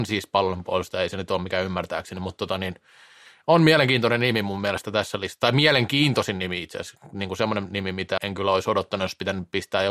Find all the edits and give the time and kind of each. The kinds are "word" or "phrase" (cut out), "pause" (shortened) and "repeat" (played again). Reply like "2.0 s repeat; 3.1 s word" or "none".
8.2 s word